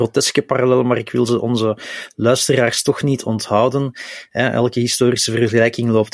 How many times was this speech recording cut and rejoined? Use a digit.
0